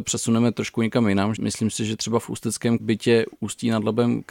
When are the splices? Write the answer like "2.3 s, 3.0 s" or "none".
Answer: 1.4 s, 2.8 s